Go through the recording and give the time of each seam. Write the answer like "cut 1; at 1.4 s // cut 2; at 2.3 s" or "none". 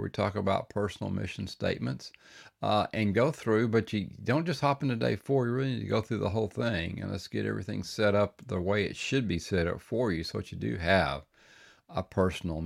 none